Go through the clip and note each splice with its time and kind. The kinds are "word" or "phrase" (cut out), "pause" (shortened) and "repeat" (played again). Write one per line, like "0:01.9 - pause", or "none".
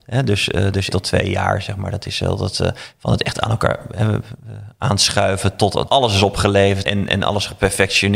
0:00.9 - word
0:05.9 - word
0:06.8 - word